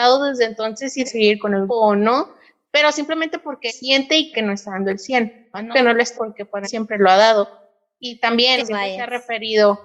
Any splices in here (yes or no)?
yes